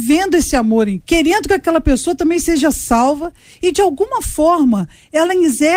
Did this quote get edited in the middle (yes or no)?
yes